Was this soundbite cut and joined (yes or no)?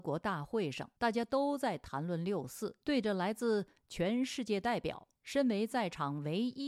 yes